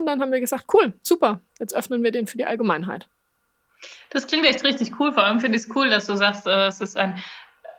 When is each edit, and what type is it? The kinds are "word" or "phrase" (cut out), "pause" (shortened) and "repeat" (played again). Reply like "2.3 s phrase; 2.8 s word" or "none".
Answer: 1.5 s pause